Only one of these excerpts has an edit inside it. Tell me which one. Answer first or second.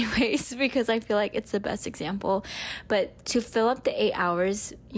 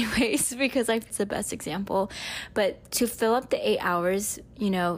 second